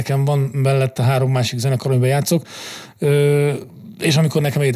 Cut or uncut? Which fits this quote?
uncut